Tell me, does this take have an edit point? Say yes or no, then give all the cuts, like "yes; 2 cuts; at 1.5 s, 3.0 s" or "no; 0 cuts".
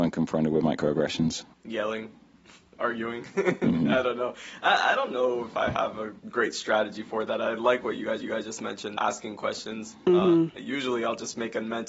yes; 4 cuts; at 1.5 s, 6.2 s, 8.2 s, 9.0 s